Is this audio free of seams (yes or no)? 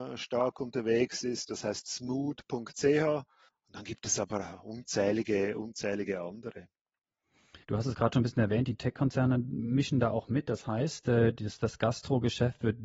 no